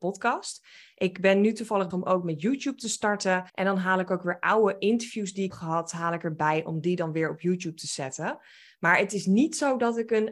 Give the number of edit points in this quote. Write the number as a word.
three